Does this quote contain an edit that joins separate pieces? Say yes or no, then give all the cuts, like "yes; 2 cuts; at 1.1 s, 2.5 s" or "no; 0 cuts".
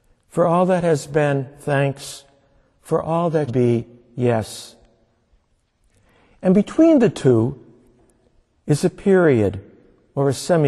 yes; 1 cut; at 3.5 s